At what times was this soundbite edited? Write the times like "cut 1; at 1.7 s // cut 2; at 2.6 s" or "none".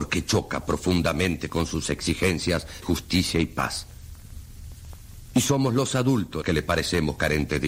cut 1; at 2.8 s // cut 2; at 6.4 s